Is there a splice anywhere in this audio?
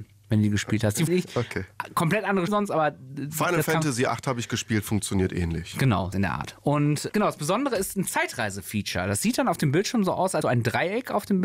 yes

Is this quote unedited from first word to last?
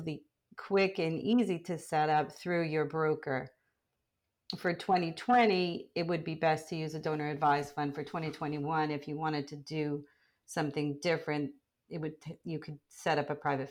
yes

